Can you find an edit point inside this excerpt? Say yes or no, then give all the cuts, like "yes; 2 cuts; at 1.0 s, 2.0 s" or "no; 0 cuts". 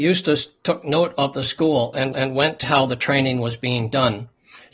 yes; 2 cuts; at 2.1 s, 2.6 s